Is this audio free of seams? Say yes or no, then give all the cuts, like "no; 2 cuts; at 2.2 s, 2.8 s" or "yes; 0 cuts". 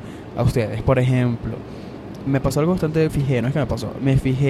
no; 2 cuts; at 2.3 s, 3.1 s